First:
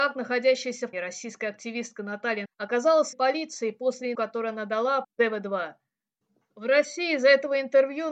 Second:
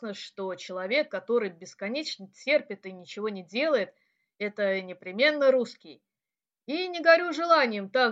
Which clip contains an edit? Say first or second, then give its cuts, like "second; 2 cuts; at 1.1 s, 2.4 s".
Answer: first; 5 cuts; at 0.9 s, 2.4 s, 3.1 s, 4.1 s, 5.0 s